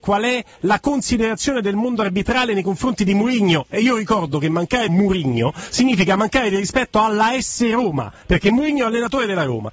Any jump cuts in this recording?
yes; 1 cut; at 4.9 s

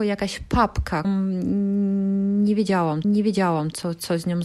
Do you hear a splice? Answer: yes; 2 cuts; at 1.0 s, 3.0 s

